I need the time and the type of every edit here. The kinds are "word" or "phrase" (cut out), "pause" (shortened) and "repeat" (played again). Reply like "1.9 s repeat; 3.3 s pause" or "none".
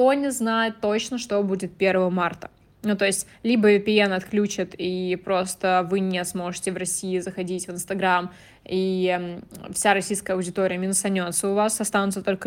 none